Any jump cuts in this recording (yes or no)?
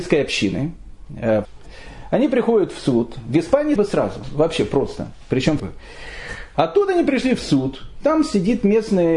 yes